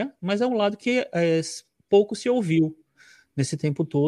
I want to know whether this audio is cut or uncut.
uncut